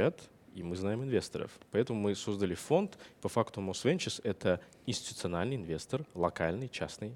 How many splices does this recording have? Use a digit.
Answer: 0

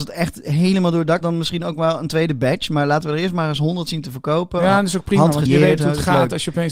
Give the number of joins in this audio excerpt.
3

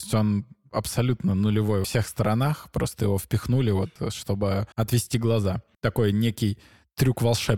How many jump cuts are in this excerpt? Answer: 2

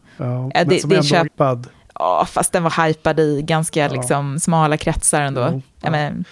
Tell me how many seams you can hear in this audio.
1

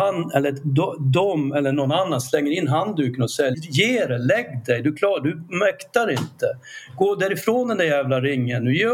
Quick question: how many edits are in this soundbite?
1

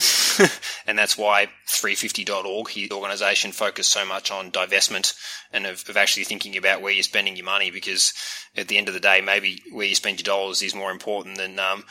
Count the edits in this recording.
1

